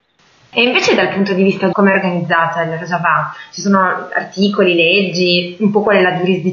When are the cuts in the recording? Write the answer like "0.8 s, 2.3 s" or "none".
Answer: 1.7 s

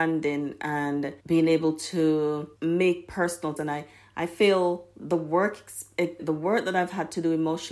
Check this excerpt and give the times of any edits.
1.2 s, 2.6 s, 3.6 s, 6.2 s

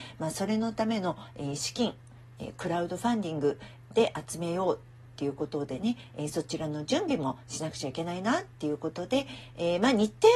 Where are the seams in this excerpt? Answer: none

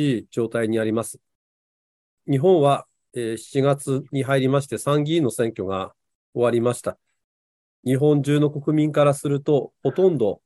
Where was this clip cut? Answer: none

